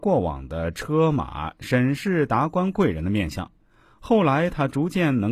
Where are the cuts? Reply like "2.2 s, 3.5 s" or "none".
none